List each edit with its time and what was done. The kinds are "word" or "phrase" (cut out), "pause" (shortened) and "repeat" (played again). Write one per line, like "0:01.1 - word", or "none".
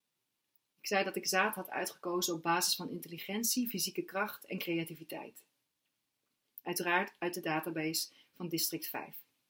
none